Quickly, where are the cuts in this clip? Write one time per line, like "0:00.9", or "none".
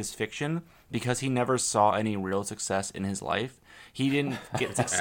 none